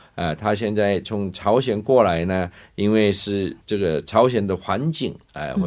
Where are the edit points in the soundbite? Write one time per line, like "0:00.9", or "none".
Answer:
0:03.6